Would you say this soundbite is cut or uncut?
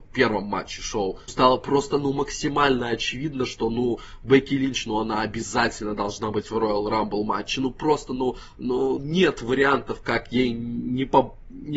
cut